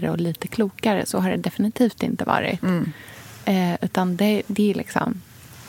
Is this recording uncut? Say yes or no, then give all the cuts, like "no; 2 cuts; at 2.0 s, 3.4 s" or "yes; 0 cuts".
yes; 0 cuts